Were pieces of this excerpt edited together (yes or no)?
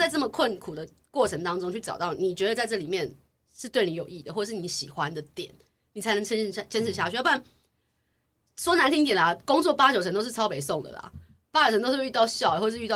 no